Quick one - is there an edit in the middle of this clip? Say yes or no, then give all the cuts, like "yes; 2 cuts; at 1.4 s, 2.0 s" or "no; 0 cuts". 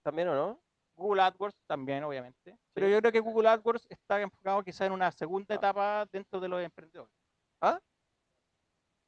no; 0 cuts